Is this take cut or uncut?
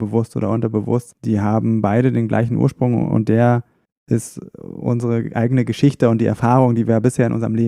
uncut